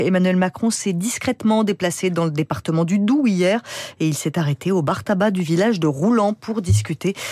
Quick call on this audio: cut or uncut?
uncut